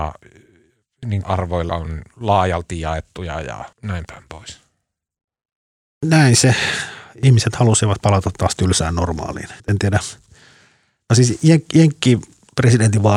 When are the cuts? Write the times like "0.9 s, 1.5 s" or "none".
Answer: 1.2 s, 1.7 s, 3.7 s, 9.6 s